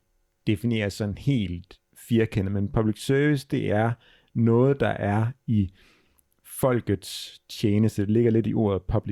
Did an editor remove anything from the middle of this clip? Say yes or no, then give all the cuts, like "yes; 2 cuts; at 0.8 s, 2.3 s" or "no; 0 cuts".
no; 0 cuts